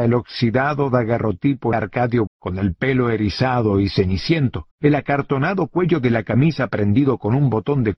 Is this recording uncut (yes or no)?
no